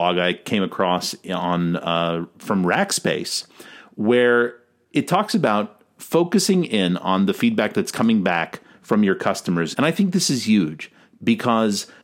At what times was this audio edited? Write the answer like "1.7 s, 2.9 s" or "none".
none